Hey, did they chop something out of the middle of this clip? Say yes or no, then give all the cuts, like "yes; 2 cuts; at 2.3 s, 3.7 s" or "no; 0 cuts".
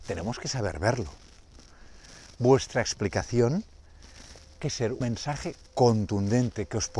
yes; 2 cuts; at 4.6 s, 5.0 s